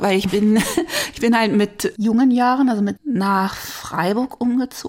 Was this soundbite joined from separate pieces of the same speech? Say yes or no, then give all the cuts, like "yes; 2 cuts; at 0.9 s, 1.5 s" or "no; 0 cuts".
yes; 1 cut; at 3.0 s